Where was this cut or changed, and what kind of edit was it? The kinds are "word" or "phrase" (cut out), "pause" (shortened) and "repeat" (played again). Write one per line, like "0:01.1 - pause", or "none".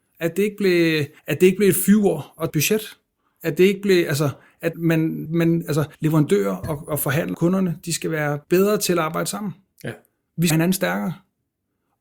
0:01.2 - word
0:02.5 - word
0:04.7 - word
0:05.3 - word
0:05.9 - pause
0:07.3 - word
0:08.4 - pause
0:10.5 - phrase